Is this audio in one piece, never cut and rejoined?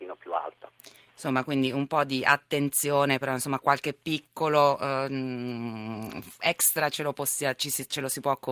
yes; 0 cuts

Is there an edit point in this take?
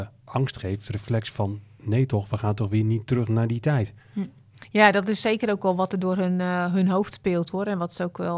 no; 0 cuts

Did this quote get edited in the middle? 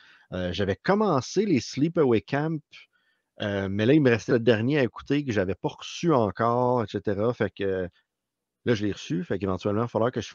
yes; 1 cut; at 4.3 s

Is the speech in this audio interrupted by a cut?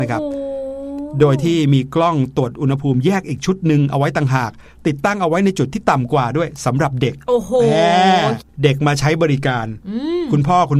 no; 0 cuts

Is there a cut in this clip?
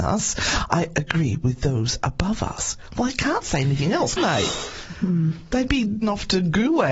yes; 3 cuts; at 0.9 s, 4.2 s, 6.0 s

